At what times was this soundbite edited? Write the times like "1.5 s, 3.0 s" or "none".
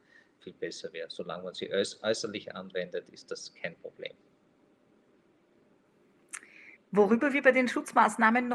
6.8 s